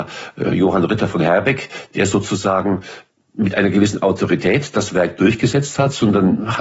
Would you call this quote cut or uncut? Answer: uncut